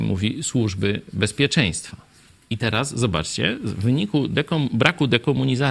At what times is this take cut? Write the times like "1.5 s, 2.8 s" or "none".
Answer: none